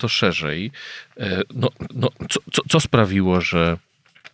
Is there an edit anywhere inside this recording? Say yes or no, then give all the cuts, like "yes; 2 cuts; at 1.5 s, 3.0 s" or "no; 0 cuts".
yes; 1 cut; at 1.9 s